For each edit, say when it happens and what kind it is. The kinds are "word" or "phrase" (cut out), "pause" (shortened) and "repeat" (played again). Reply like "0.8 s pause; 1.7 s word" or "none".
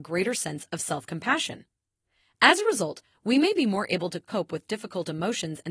none